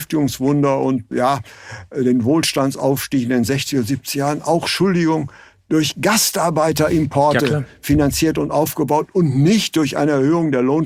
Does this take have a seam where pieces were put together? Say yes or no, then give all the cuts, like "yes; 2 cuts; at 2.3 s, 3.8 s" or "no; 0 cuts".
yes; 1 cut; at 1.1 s